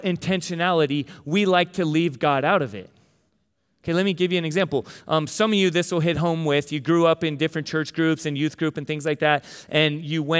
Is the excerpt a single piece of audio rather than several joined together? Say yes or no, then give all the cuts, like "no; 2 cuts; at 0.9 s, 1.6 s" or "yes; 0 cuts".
yes; 0 cuts